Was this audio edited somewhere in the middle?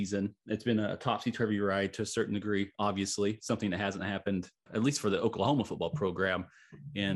yes; 1 cut; at 4.7 s

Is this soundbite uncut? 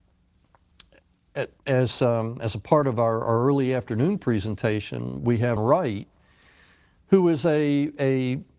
no; 2 cuts; at 1.6 s, 5.6 s

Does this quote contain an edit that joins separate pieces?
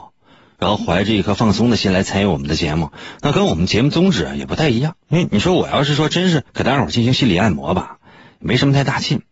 yes; 2 cuts; at 5.0 s, 6.5 s

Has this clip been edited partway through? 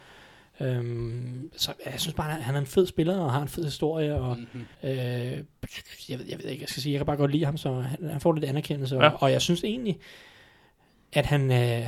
yes; 1 cut; at 4.7 s

